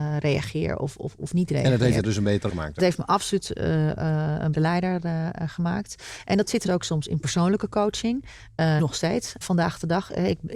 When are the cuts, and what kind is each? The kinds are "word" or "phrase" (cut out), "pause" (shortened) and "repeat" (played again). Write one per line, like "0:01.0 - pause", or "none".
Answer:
0:01.2 - word
0:02.5 - word
0:02.8 - word
0:04.5 - word
0:06.7 - word
0:08.8 - word
0:09.4 - word